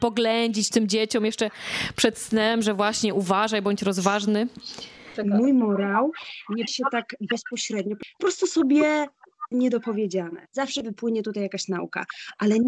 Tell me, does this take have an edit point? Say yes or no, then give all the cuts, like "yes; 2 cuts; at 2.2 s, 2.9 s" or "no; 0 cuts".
yes; 3 cuts; at 6.7 s, 8.2 s, 9.5 s